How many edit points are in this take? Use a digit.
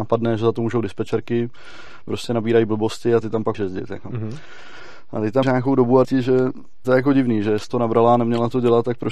6